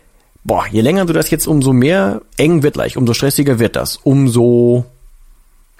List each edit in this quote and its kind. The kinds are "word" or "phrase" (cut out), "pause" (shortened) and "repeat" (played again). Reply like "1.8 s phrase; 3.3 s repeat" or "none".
1.4 s word; 2.7 s word